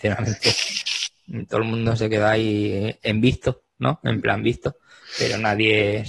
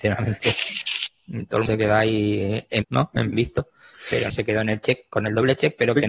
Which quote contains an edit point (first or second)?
second